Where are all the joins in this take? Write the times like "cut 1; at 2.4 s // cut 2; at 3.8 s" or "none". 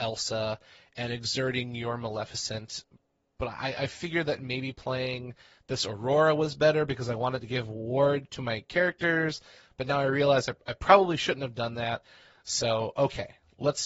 none